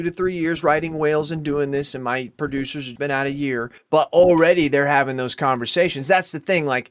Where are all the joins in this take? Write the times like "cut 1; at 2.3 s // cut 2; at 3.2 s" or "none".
cut 1; at 3.0 s // cut 2; at 3.8 s